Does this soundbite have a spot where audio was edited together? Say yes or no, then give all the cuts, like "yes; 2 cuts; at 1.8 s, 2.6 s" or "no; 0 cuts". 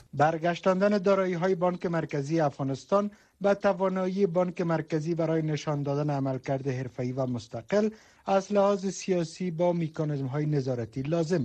no; 0 cuts